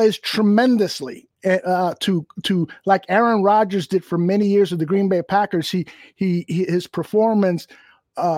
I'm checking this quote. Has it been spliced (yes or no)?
no